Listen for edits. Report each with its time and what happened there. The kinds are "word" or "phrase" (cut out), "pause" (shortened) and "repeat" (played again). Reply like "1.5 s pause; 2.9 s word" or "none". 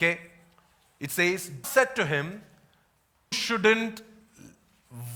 1.6 s word; 3.3 s word